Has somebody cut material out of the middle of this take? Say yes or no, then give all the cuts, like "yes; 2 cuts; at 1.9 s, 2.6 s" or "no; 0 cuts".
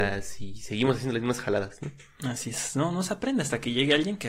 no; 0 cuts